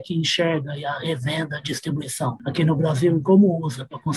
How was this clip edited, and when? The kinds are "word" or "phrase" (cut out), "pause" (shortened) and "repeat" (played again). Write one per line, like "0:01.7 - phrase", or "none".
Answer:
none